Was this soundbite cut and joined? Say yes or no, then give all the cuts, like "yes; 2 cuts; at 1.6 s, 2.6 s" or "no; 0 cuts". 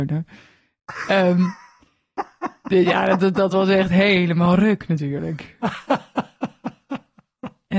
no; 0 cuts